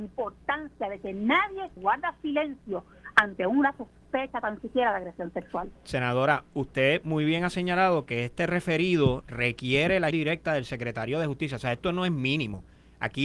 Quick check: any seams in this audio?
yes; 2 cuts; at 1.8 s, 10.1 s

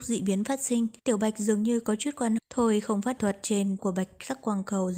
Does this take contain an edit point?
yes; 4 cuts; at 1.0 s, 2.4 s, 3.2 s, 3.8 s

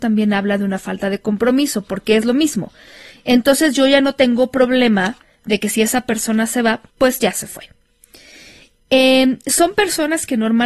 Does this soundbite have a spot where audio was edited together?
yes; 1 cut; at 6.9 s

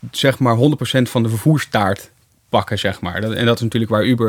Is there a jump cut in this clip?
no; 0 cuts

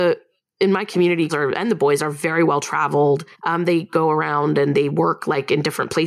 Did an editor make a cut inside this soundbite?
yes; 2 cuts; at 1.3 s, 3.3 s

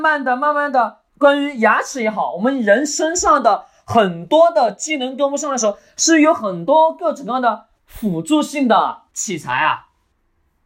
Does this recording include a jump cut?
yes; 3 cuts; at 1.1 s, 7.8 s, 9.1 s

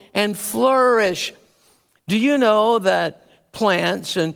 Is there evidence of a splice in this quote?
no; 0 cuts

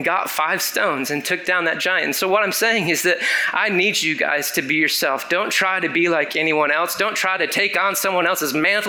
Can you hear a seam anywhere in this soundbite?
no; 0 cuts

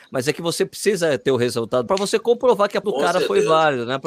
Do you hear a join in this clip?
yes; 2 cuts; at 1.9 s, 2.8 s

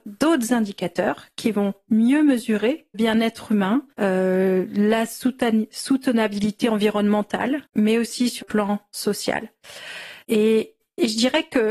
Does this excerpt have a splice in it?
yes; 5 cuts; at 2.9 s, 3.9 s, 7.6 s, 8.4 s, 10.2 s

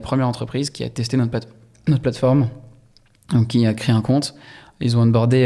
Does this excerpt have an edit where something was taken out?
no; 0 cuts

